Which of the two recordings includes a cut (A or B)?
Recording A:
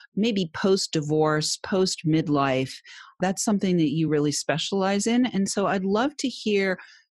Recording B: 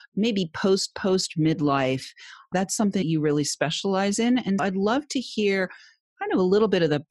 B